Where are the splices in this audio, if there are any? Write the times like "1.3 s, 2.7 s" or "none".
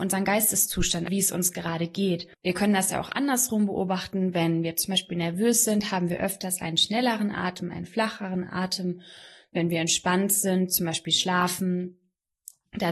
1.1 s, 2.3 s